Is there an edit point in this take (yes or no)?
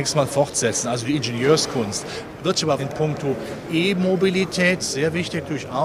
yes